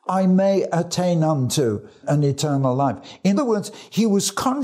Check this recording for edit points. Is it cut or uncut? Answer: cut